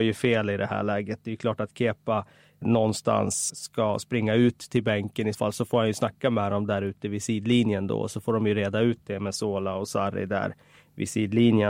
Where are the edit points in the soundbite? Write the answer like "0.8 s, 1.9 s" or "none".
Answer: 2.6 s, 3.5 s, 5.3 s